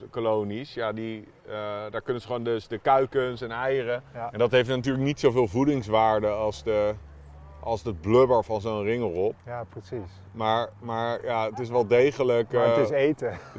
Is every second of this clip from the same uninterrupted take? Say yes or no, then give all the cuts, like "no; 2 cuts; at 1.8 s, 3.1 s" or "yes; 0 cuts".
no; 2 cuts; at 4.1 s, 9.4 s